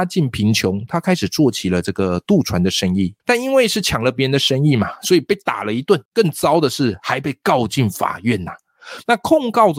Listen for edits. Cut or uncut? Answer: cut